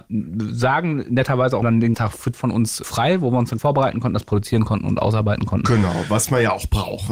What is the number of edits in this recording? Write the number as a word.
five